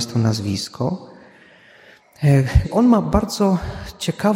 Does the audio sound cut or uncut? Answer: cut